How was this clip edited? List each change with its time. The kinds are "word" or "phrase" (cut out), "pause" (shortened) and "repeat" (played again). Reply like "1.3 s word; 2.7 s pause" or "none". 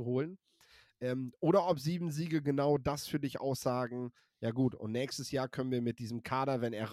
none